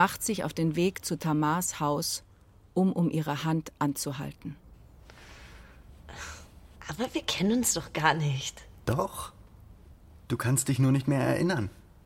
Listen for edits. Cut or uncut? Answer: uncut